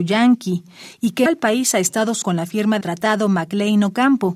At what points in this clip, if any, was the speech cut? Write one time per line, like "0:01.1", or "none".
0:01.3
0:02.2
0:02.8